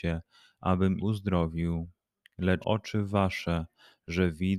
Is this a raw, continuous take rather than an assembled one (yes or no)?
no